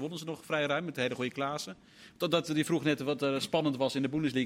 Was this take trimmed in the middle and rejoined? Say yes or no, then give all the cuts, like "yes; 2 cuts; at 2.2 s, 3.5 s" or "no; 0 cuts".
no; 0 cuts